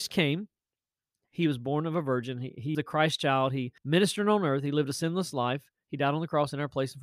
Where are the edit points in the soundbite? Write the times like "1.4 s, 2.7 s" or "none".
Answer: 2.7 s, 3.8 s